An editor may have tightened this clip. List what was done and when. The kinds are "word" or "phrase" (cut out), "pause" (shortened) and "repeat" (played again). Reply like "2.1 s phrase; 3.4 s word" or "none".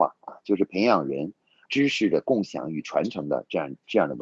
1.7 s word

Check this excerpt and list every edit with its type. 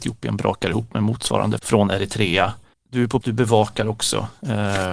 1.6 s word; 2.7 s pause; 3.2 s word

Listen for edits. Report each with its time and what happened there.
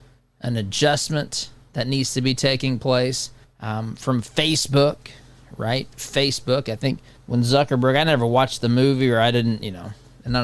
3.4 s pause; 7.2 s pause

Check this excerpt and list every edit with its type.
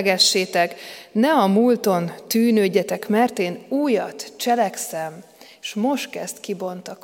none

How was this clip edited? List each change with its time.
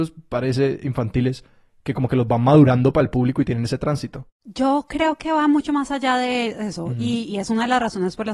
none

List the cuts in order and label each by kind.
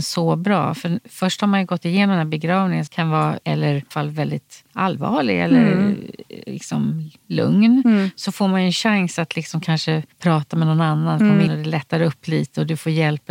2.9 s word; 3.4 s word; 3.9 s word; 4.7 s pause; 10.1 s pause; 11.5 s word

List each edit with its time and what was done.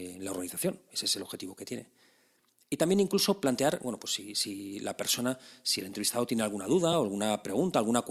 none

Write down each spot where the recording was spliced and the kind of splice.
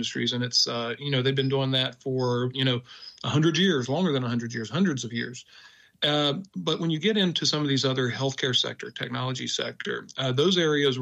none

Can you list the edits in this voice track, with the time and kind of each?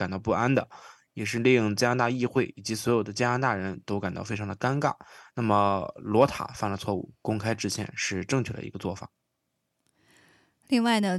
none

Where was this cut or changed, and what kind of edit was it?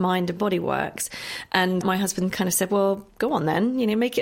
1.8 s word

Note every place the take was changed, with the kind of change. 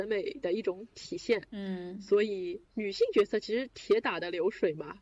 2.7 s pause

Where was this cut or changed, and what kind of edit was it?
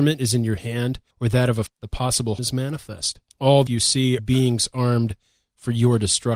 1.1 s pause; 1.7 s word; 2.4 s word; 3.3 s pause; 3.7 s phrase; 4.2 s phrase

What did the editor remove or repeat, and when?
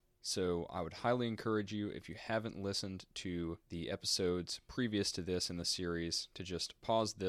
3.6 s pause

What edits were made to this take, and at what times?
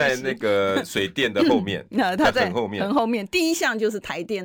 none

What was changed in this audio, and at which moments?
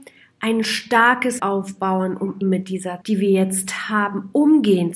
1.4 s word; 2.4 s word; 3.0 s word

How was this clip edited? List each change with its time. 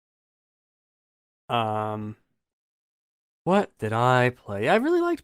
3.8 s word

